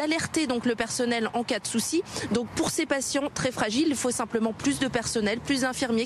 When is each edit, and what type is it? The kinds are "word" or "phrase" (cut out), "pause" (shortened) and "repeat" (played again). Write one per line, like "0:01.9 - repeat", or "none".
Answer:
none